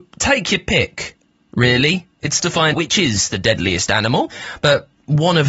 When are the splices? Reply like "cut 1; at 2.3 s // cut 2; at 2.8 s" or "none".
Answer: cut 1; at 2.4 s // cut 2; at 2.7 s